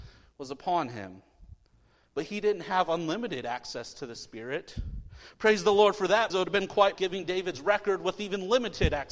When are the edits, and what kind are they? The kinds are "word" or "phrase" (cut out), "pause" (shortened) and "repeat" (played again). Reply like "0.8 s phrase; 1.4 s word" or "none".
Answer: 6.3 s word; 6.9 s word